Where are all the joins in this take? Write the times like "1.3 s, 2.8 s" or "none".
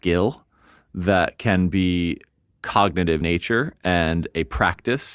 3.2 s